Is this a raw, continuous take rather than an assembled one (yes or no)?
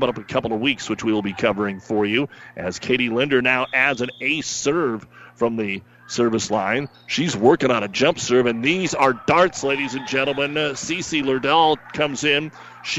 yes